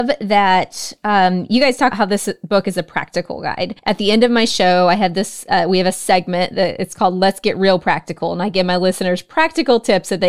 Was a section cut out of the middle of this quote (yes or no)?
yes